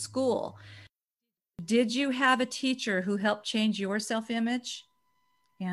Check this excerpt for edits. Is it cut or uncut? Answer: uncut